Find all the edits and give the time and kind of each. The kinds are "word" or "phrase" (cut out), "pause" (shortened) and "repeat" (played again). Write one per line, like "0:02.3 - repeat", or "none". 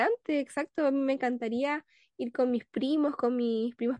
none